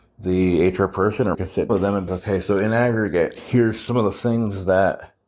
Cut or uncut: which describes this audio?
cut